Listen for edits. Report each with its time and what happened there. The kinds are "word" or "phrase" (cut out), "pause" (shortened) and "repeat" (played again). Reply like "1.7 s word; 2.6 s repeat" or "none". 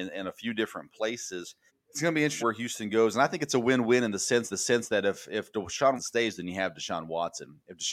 1.7 s pause; 2.4 s phrase; 4.5 s repeat; 6.0 s word